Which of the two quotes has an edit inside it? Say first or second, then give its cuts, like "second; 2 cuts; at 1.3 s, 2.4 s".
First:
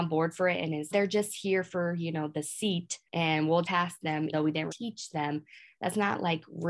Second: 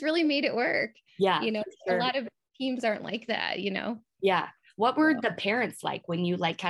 first; 5 cuts; at 0.9 s, 3.0 s, 3.6 s, 4.3 s, 4.7 s